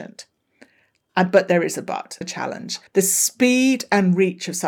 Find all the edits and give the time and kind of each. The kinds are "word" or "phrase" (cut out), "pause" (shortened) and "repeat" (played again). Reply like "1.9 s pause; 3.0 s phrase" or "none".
2.2 s word; 2.9 s pause